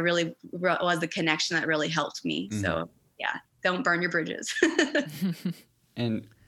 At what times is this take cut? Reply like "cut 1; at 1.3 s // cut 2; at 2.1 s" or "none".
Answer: none